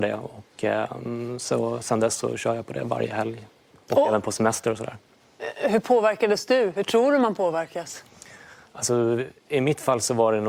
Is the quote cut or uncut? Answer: uncut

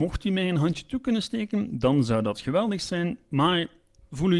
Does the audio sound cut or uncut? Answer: uncut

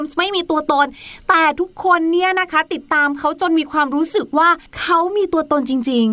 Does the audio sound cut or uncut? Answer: cut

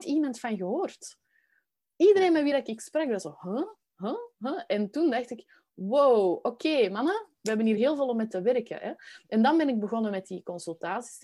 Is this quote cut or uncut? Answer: uncut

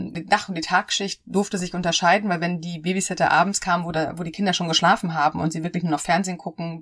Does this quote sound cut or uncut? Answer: uncut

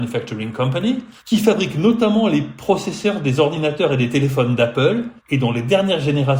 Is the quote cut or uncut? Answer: cut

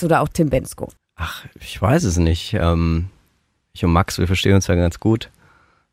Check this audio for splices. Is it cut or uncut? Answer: cut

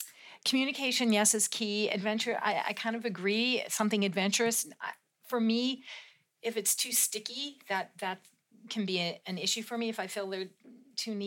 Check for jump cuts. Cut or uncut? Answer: uncut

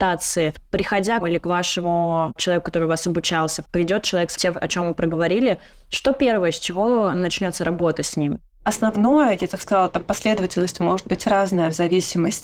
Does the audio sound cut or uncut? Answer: cut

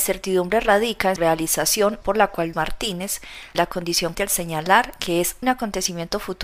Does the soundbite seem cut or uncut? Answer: cut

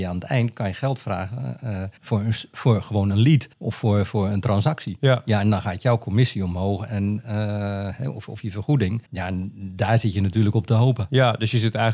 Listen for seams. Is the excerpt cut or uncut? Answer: cut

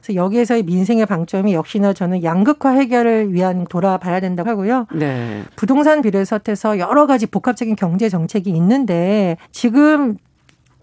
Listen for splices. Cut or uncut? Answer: cut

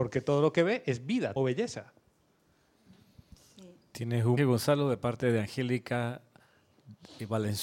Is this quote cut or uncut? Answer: cut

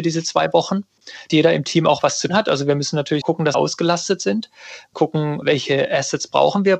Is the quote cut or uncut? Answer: cut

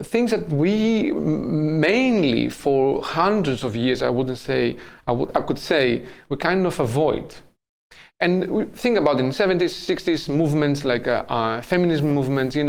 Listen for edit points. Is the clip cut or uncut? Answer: uncut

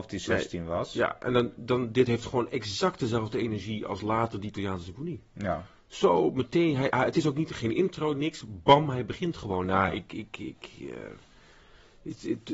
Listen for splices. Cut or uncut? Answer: cut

